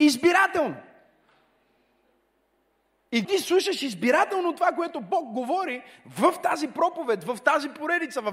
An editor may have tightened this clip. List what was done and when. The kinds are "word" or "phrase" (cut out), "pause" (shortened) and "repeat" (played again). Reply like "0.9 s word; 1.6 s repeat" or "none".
3.2 s word